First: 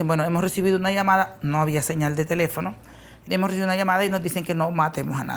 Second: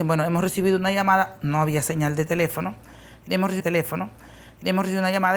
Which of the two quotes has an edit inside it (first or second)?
second